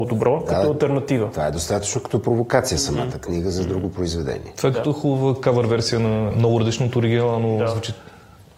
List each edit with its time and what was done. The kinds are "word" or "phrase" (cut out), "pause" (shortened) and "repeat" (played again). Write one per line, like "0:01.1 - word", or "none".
0:06.3 - phrase